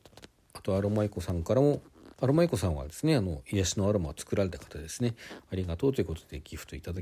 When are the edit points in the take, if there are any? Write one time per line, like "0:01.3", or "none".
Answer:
0:02.1